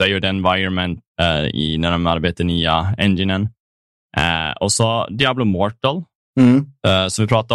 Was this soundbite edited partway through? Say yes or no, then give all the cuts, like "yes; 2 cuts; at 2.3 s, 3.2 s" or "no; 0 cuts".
no; 0 cuts